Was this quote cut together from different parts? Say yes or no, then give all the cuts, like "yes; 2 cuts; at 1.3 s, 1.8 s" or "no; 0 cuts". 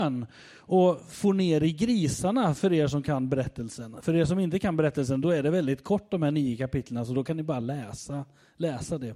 no; 0 cuts